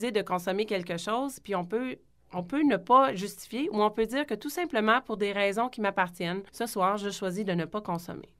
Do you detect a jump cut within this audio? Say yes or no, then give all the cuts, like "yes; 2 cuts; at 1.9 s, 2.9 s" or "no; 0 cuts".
yes; 1 cut; at 6.5 s